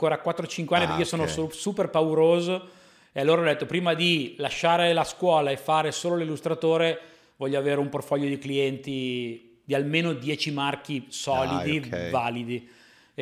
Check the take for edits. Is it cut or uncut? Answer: uncut